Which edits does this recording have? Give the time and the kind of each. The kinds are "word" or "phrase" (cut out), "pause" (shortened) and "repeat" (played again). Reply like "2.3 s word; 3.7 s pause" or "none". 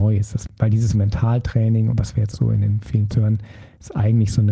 0.9 s word; 1.9 s word; 2.3 s word; 3.1 s word

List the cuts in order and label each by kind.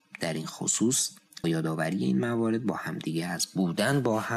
1.4 s word

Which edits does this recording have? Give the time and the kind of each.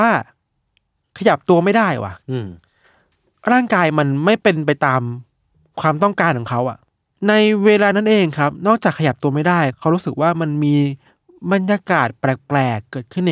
2.2 s pause

